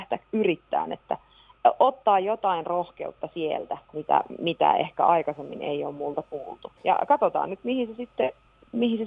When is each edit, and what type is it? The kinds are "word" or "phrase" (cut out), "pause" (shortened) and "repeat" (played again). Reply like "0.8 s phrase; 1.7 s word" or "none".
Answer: 3.8 s pause; 6.8 s pause